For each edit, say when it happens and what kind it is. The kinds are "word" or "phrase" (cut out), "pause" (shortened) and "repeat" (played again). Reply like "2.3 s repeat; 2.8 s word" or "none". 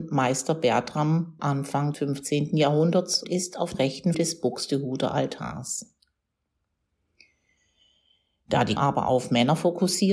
1.4 s word; 1.9 s word; 3.2 s word; 3.7 s word; 4.1 s word; 8.8 s word

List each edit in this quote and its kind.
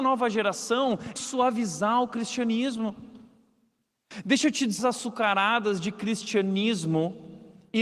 1.2 s word; 4.8 s phrase

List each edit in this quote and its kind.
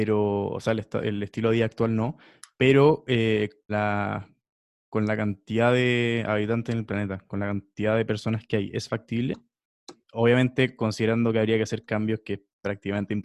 3.7 s word

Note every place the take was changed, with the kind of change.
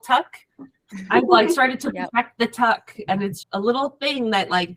3.4 s word

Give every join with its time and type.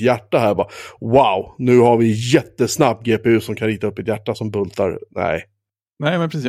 none

